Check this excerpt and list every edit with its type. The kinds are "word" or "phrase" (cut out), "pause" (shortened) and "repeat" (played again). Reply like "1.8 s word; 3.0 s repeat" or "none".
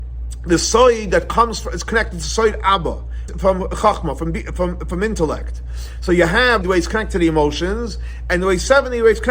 3.3 s phrase; 6.6 s phrase

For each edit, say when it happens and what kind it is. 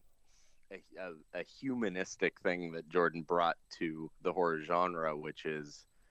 4.2 s pause

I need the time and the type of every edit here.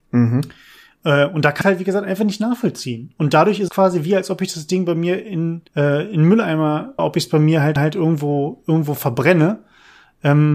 1.6 s word; 3.7 s word; 5.7 s pause; 7.0 s phrase; 7.8 s repeat

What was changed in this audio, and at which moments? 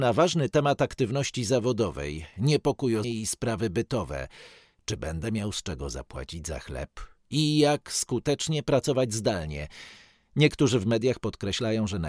3.0 s word

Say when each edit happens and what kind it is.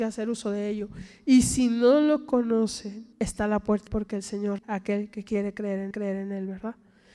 3.1 s pause; 3.9 s word; 4.6 s word; 5.9 s repeat

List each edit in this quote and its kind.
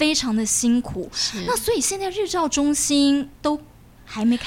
3.3 s pause

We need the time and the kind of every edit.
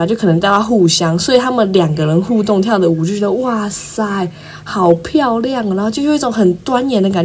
none

